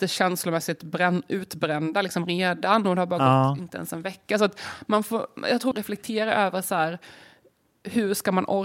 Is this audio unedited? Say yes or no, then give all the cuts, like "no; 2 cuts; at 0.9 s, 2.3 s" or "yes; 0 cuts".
no; 1 cut; at 5.7 s